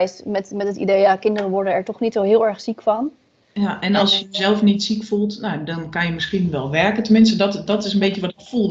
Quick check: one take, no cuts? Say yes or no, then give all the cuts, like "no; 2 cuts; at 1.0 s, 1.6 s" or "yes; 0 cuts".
yes; 0 cuts